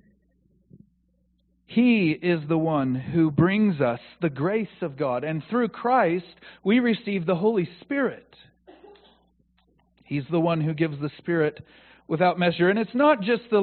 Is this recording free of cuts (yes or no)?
yes